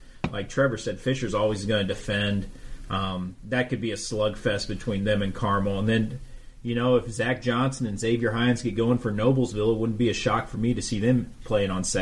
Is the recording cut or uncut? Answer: uncut